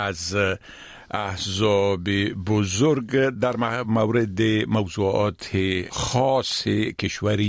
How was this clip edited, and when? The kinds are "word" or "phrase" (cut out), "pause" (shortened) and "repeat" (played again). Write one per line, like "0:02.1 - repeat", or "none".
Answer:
none